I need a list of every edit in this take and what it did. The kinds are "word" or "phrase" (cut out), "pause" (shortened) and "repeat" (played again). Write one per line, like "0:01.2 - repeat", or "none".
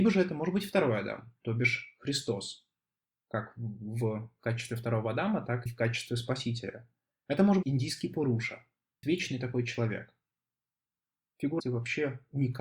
0:05.7 - word
0:07.6 - word
0:09.0 - word
0:11.6 - word